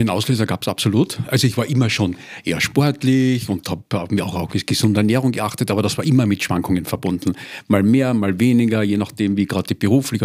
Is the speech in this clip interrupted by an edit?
no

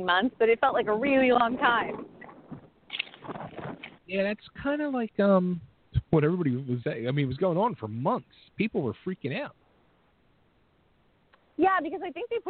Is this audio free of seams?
no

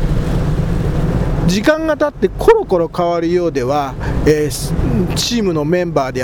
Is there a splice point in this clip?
no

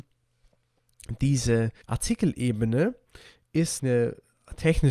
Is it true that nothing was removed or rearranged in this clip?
no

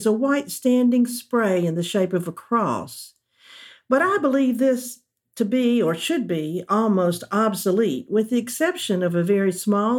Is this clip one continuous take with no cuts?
yes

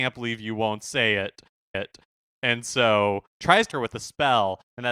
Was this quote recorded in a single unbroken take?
no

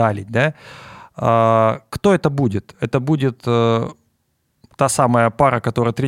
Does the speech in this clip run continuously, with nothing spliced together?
yes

